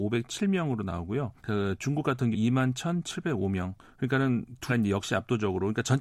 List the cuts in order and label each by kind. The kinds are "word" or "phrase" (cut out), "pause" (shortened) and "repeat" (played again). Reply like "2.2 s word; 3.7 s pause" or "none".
1.4 s pause; 2.3 s word; 3.8 s pause; 4.7 s word